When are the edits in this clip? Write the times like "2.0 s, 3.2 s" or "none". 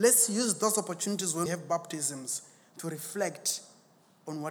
1.5 s

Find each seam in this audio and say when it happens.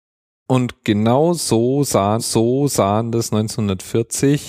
2.2 s

